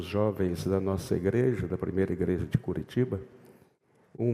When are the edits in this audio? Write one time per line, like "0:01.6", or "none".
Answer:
none